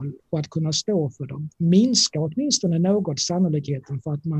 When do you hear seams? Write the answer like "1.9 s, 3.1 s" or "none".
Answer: 1.5 s